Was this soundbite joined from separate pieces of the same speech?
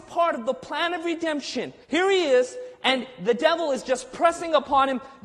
yes; 1 cut; at 1.8 s

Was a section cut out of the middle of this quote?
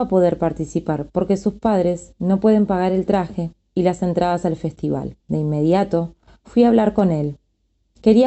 yes; 1 cut; at 5.2 s

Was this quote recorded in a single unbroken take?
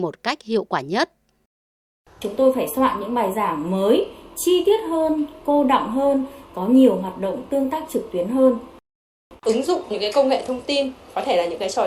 yes; 0 cuts

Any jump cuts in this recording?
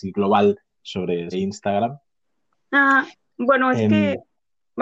yes; 1 cut; at 1.3 s

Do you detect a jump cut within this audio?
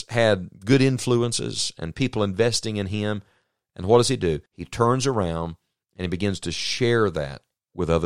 yes; 1 cut; at 4.5 s

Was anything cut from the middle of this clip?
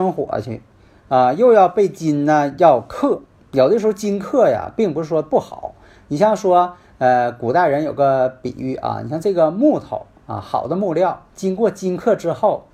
no; 0 cuts

